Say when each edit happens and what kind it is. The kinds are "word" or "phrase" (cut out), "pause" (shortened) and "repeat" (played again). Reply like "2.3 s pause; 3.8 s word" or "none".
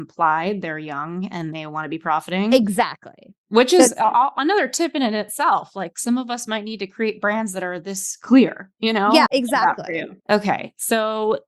9.3 s word; 10.2 s pause